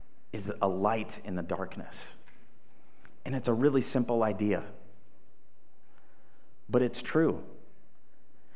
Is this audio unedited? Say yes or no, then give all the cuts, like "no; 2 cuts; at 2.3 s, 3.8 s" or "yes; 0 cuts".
yes; 0 cuts